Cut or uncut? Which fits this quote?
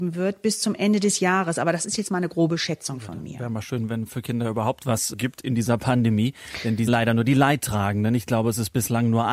cut